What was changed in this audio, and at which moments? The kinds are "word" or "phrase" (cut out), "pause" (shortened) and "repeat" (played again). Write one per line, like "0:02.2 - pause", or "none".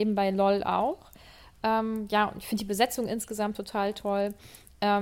none